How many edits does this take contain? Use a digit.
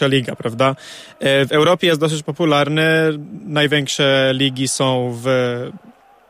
0